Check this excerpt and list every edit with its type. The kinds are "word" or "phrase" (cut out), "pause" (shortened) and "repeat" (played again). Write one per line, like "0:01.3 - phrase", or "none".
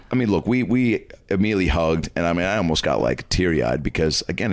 none